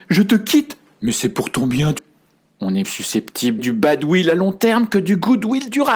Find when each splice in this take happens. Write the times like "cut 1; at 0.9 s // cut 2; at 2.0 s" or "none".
cut 1; at 2.0 s // cut 2; at 2.8 s // cut 3; at 3.6 s